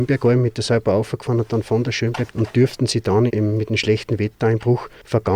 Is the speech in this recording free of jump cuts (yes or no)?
no